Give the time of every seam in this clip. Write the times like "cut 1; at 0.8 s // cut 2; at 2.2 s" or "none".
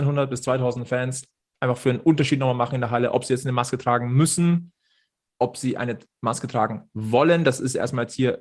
none